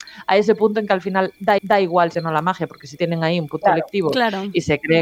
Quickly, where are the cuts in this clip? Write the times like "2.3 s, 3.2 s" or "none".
1.6 s, 2.1 s, 3.0 s, 3.6 s